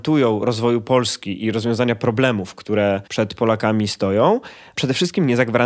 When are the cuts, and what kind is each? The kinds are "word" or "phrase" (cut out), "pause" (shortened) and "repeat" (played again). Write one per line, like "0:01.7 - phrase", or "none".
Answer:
0:03.1 - pause
0:04.8 - word